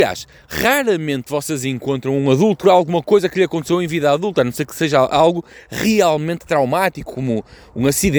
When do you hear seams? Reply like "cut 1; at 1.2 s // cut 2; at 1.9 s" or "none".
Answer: cut 1; at 2.6 s